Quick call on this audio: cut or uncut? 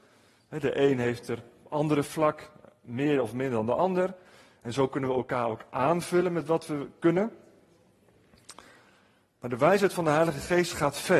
uncut